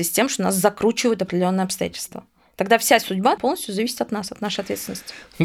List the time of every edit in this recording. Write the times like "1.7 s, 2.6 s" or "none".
3.4 s